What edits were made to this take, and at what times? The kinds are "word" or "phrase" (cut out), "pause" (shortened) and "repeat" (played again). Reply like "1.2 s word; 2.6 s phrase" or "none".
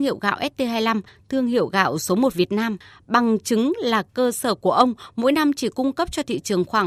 none